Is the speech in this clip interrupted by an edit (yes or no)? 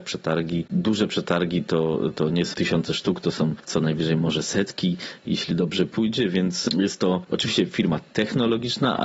no